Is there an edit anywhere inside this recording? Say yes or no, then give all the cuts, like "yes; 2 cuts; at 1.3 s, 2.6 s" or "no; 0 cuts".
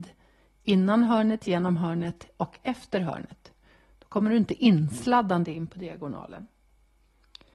no; 0 cuts